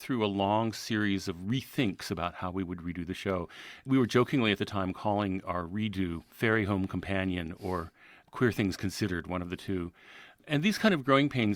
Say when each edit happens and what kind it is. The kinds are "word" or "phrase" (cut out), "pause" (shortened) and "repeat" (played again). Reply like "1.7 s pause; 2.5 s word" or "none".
none